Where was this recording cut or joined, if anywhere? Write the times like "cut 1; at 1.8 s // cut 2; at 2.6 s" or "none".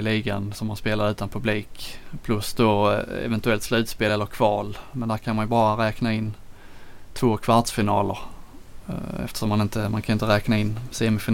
none